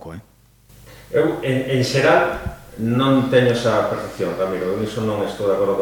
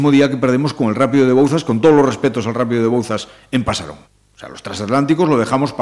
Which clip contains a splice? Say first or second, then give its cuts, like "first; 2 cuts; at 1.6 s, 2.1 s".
second; 1 cut; at 4.0 s